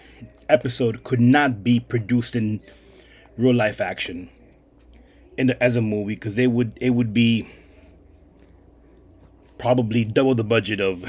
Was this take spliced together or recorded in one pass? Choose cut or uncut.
uncut